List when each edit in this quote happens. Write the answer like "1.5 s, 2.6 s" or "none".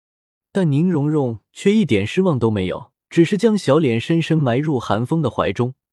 3.0 s